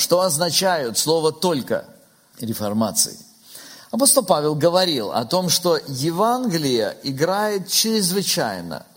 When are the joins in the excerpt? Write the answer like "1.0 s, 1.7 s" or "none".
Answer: 2.3 s